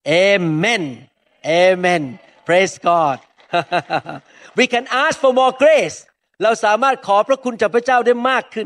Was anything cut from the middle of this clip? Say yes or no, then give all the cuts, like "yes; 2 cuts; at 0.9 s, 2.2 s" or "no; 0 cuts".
no; 0 cuts